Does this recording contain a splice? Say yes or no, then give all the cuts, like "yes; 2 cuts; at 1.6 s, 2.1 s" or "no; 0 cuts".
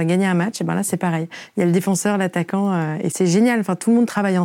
no; 0 cuts